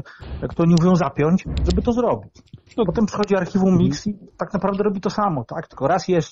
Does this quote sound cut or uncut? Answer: uncut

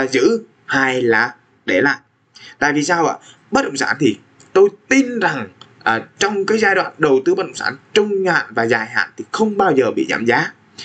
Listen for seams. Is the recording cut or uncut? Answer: uncut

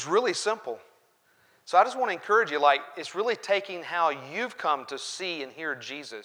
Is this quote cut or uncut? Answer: uncut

